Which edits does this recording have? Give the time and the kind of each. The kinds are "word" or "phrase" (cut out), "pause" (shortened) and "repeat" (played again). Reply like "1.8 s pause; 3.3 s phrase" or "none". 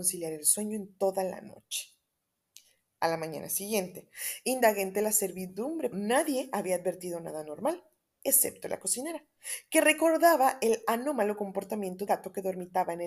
5.9 s word; 12.1 s word